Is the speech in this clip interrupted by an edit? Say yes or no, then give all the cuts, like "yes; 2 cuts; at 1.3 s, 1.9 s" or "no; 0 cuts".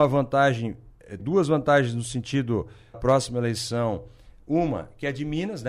yes; 2 cuts; at 1.2 s, 2.9 s